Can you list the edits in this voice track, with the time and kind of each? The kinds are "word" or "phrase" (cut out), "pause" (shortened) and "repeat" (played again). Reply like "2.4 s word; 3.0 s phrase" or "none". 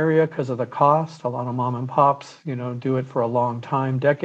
none